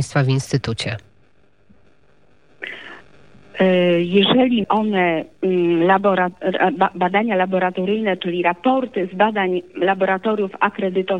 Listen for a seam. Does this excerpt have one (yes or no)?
yes